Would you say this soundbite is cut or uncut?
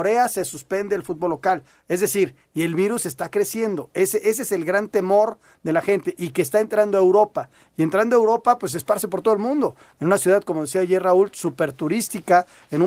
uncut